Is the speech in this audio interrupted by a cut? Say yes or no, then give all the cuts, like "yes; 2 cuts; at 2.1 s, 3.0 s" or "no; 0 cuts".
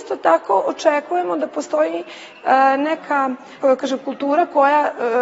yes; 1 cut; at 3.6 s